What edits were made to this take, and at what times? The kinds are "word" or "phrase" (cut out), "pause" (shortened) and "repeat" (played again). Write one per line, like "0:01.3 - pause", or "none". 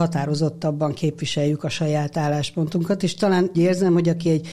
0:03.5 - word